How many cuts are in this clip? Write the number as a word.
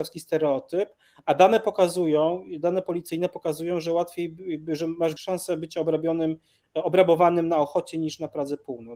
one